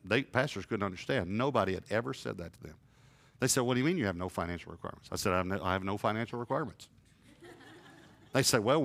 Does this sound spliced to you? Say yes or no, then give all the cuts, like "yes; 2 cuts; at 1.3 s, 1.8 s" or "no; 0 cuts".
no; 0 cuts